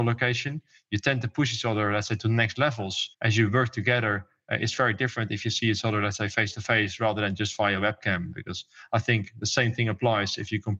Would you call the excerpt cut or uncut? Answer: cut